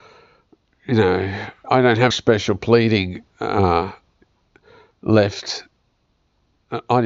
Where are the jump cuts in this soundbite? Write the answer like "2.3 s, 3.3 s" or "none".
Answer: 1.6 s, 2.1 s